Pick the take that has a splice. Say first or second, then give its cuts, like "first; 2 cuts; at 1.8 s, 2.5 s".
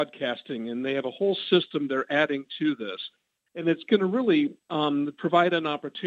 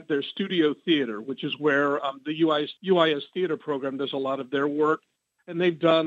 second; 1 cut; at 2.8 s